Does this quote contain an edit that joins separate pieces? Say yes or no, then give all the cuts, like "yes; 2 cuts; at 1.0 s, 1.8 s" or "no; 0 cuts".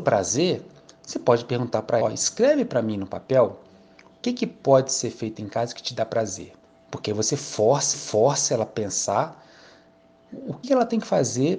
yes; 5 cuts; at 2.0 s, 4.2 s, 6.6 s, 7.9 s, 10.6 s